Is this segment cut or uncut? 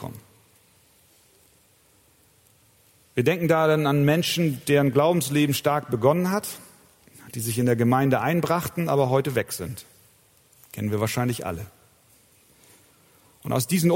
uncut